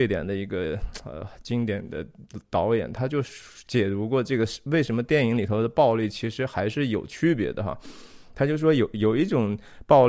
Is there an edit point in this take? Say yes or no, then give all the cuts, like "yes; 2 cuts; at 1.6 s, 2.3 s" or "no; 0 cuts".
no; 0 cuts